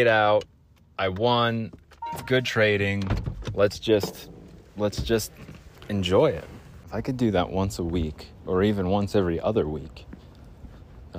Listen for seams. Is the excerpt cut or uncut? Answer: cut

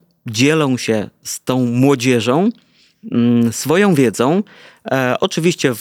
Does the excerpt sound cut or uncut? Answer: uncut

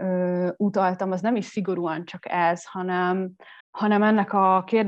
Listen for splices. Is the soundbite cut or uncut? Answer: cut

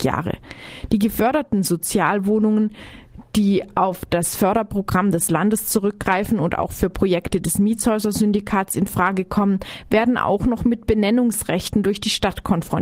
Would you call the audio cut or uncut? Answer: uncut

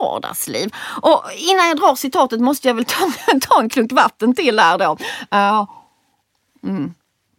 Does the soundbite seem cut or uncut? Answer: uncut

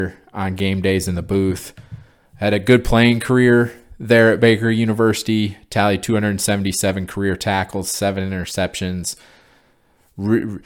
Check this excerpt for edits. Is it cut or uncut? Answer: uncut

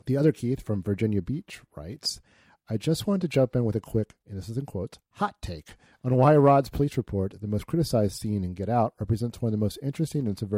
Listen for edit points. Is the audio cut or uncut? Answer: uncut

